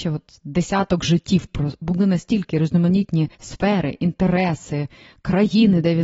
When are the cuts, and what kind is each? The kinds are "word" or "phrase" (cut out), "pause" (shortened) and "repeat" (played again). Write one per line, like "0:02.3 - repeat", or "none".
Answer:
0:01.8 - phrase
0:03.3 - pause